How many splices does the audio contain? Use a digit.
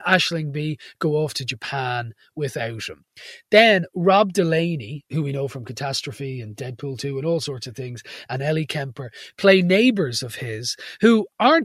0